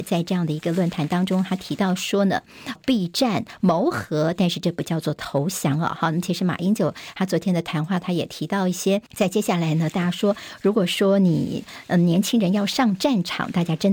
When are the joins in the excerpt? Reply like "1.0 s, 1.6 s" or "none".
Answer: 2.8 s, 9.1 s